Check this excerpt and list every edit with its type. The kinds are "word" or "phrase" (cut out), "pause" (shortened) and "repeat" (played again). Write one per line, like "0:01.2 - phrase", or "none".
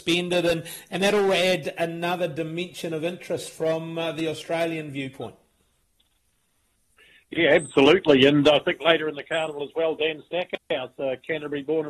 none